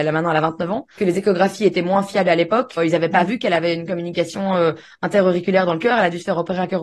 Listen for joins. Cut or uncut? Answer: cut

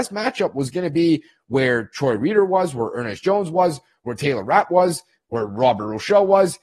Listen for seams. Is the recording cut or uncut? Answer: uncut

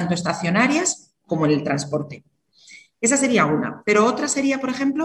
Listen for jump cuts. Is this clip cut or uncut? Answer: uncut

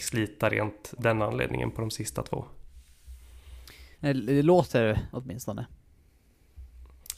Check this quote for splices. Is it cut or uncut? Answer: cut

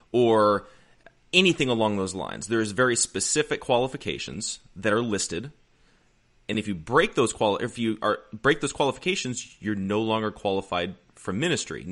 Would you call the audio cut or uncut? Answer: uncut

